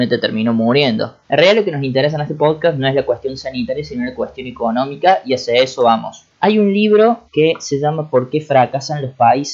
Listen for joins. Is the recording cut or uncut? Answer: cut